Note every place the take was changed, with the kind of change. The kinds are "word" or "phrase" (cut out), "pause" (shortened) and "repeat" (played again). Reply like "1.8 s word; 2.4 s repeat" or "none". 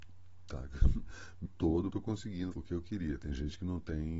1.5 s word; 1.9 s word; 2.5 s phrase